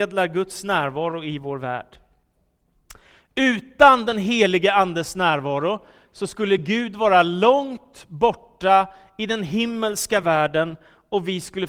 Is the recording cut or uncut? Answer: uncut